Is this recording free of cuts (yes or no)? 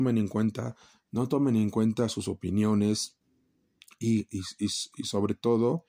yes